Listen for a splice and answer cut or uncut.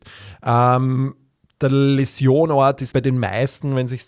cut